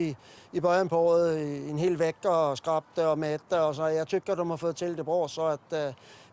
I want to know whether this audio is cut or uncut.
uncut